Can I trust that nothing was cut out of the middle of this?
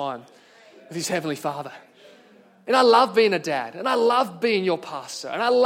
yes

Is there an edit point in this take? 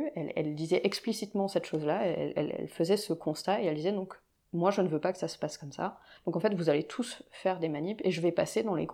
no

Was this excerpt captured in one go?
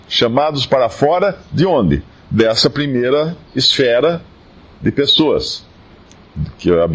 yes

